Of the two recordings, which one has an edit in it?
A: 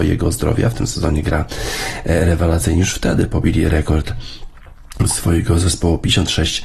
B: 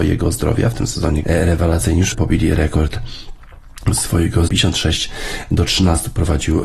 B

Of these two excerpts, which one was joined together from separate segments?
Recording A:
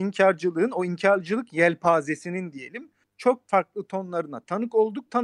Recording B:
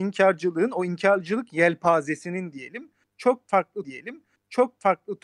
B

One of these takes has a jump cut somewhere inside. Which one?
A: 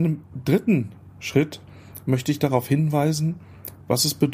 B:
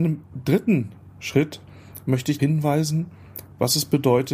B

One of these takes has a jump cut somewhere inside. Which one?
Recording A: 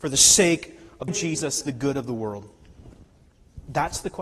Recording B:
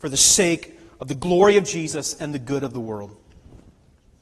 A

